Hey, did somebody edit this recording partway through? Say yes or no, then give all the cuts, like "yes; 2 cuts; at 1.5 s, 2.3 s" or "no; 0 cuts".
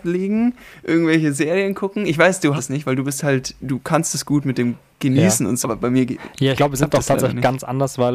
yes; 4 cuts; at 2.6 s, 3.6 s, 5.6 s, 6.6 s